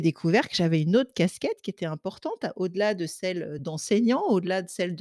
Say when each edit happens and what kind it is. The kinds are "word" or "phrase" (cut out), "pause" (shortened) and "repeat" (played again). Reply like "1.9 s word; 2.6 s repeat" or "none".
none